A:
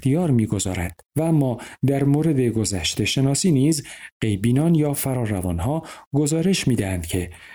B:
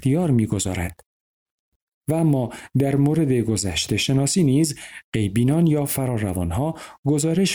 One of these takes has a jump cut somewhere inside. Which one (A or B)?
A